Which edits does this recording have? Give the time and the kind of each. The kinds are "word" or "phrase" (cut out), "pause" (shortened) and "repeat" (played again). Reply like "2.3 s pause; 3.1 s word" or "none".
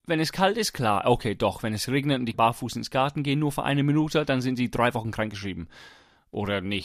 2.3 s word